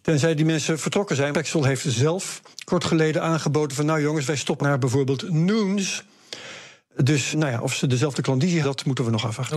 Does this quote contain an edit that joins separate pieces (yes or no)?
yes